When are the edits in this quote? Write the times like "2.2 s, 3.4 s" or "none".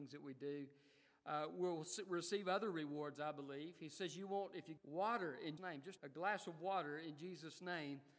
4.8 s, 5.6 s, 6.0 s